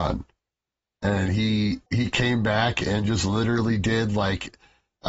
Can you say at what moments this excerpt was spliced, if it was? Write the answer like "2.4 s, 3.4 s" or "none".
1.9 s